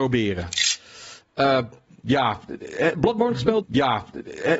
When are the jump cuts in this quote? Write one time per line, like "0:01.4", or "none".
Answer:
0:03.6